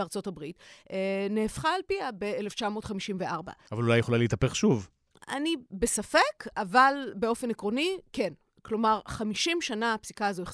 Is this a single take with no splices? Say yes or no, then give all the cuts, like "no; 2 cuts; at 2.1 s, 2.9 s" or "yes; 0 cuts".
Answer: yes; 0 cuts